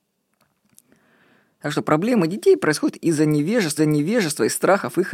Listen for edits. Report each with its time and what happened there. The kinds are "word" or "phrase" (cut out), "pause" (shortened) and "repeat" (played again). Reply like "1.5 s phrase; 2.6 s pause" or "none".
3.8 s repeat

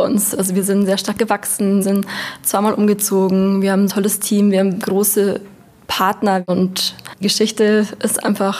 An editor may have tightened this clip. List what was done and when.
1.8 s word; 3.9 s word; 4.8 s word; 7.2 s word

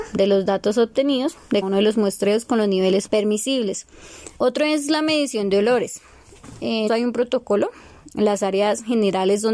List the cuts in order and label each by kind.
1.6 s word; 3.1 s word; 4.4 s pause; 6.9 s word

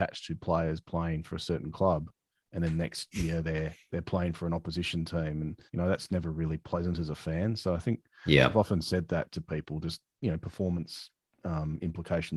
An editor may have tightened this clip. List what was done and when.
5.7 s pause

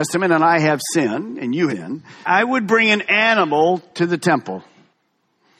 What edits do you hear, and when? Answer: 1.7 s word

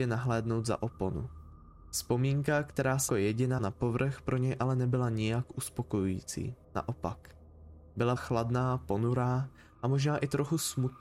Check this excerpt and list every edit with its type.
3.1 s word; 3.6 s word; 6.6 s pause; 8.2 s phrase

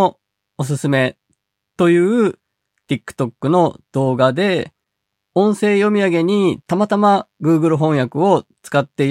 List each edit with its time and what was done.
6.6 s pause

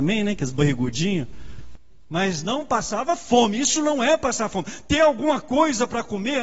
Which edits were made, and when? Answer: none

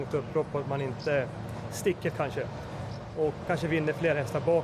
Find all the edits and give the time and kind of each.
2.1 s word; 3.5 s word

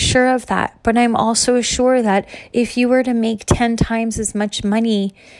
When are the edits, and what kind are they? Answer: none

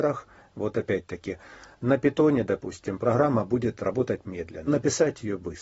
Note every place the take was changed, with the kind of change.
4.7 s word

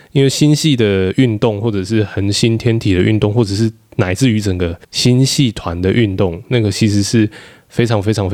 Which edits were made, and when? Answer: 4.8 s pause

